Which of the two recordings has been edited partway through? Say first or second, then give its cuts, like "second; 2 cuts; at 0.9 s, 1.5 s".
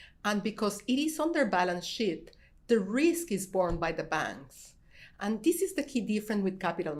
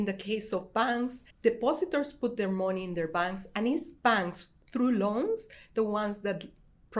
second; 1 cut; at 1.3 s